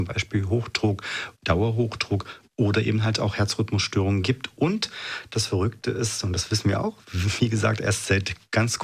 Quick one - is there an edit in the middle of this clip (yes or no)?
yes